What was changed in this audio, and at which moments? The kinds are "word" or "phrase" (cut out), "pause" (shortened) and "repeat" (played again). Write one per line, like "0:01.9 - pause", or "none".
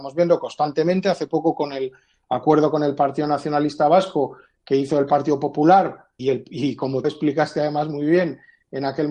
0:06.2 - word
0:07.0 - word